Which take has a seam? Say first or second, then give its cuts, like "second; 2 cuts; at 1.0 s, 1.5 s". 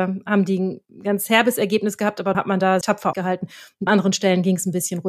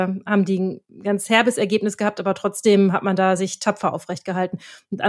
first; 4 cuts; at 2.3 s, 2.8 s, 3.1 s, 3.9 s